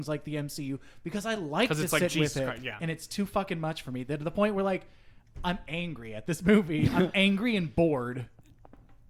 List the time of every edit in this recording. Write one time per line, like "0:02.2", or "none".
none